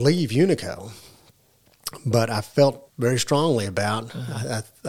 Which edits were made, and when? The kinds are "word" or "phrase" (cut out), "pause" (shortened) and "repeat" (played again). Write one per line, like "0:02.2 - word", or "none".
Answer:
0:02.9 - pause